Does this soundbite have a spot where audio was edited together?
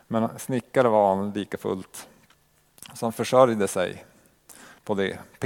no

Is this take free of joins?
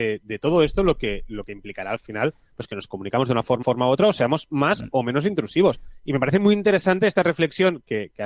no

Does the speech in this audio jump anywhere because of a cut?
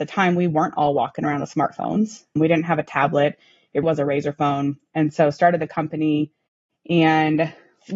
yes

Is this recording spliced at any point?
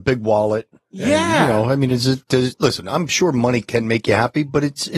yes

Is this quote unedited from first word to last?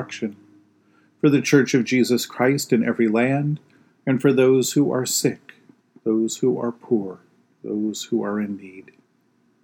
yes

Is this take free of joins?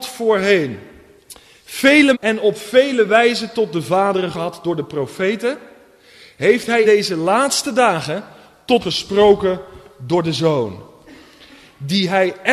no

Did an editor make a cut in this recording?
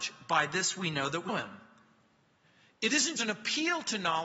yes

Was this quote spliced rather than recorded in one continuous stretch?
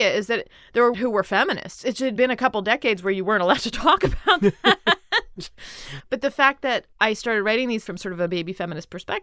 yes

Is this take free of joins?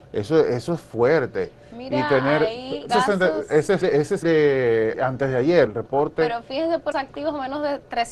no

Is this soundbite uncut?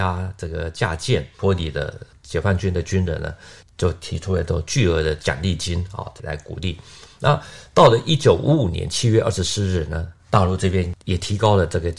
yes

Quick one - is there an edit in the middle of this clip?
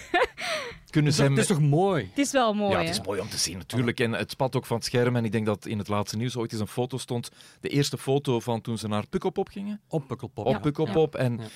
no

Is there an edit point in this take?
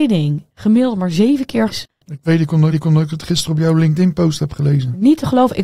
yes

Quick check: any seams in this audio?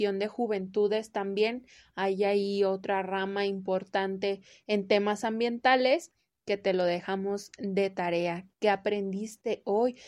no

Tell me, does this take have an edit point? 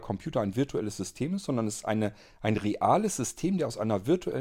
no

